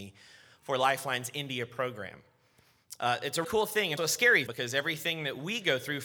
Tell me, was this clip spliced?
yes; 3 cuts; at 3.4 s, 4.0 s, 4.5 s

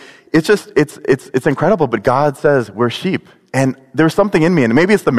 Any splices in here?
no; 0 cuts

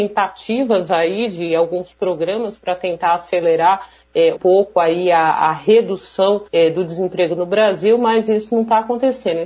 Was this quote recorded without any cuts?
no; 2 cuts; at 4.4 s, 6.5 s

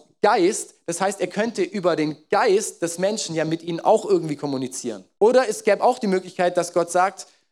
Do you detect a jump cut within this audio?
yes; 1 cut; at 5.1 s

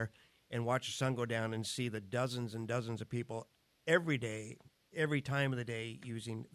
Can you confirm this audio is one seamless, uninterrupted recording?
yes; 0 cuts

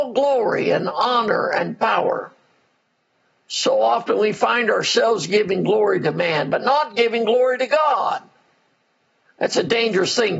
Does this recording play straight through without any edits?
yes; 0 cuts

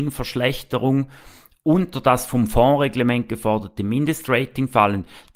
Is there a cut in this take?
no; 0 cuts

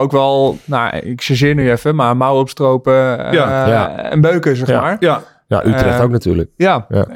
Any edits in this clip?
no; 0 cuts

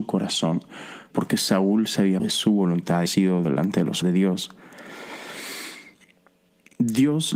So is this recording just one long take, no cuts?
no; 5 cuts; at 1.1 s, 2.2 s, 3.1 s, 3.4 s, 4.0 s

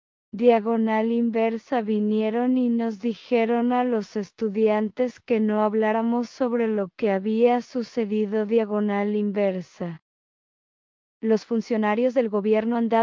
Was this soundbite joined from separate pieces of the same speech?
no; 0 cuts

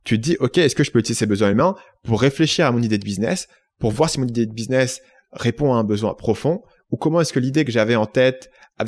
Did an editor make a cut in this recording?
no; 0 cuts

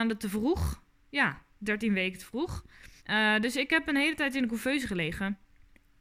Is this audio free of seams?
no; 1 cut; at 3.0 s

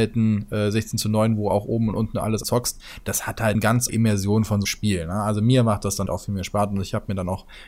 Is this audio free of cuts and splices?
no; 5 cuts; at 2.4 s, 3.5 s, 3.9 s, 4.6 s, 6.1 s

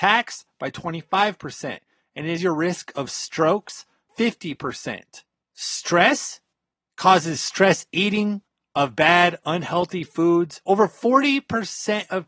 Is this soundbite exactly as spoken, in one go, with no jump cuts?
no; 2 cuts; at 2.4 s, 4.1 s

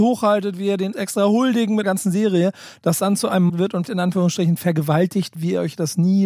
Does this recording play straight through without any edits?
no; 6 cuts; at 0.9 s, 1.8 s, 3.0 s, 3.5 s, 3.8 s, 5.3 s

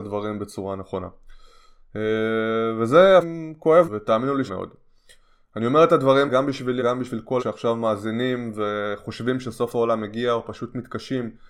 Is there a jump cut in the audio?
yes; 6 cuts; at 3.2 s, 3.8 s, 4.5 s, 6.3 s, 6.8 s, 7.4 s

